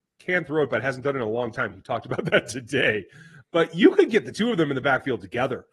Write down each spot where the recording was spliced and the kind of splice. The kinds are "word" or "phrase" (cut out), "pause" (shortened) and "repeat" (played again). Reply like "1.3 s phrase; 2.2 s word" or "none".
none